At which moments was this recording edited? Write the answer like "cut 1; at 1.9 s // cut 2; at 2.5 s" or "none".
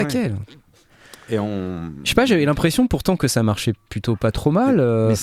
none